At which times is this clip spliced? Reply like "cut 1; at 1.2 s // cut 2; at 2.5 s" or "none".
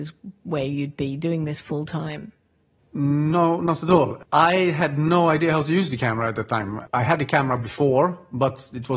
none